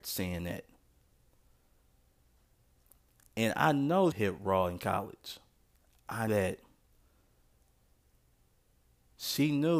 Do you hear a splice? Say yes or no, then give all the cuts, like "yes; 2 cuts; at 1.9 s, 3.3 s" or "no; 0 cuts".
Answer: yes; 2 cuts; at 4.1 s, 6.3 s